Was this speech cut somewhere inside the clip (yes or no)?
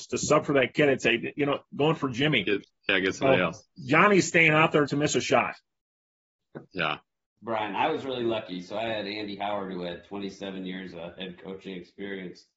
yes